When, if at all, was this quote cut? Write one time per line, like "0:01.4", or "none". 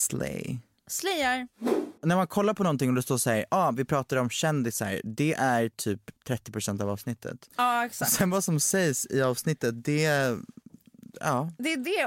0:02.0
0:06.2